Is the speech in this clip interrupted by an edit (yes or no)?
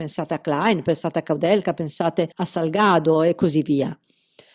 yes